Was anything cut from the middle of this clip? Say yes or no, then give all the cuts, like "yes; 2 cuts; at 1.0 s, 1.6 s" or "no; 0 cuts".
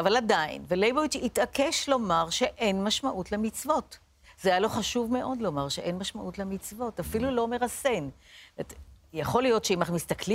no; 0 cuts